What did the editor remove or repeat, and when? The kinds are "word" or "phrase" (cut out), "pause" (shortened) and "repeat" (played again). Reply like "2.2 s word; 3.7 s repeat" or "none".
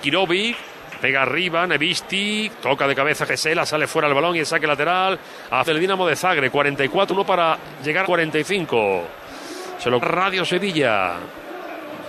3.3 s word; 5.6 s word; 7.1 s phrase; 8.0 s word; 10.0 s word